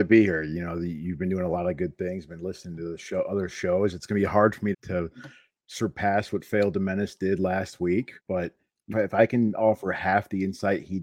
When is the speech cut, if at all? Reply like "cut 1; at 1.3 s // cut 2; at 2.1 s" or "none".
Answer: cut 1; at 4.7 s // cut 2; at 8.2 s // cut 3; at 8.9 s